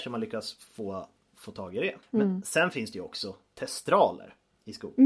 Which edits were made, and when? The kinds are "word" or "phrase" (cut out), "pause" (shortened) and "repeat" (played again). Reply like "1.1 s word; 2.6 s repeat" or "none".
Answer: none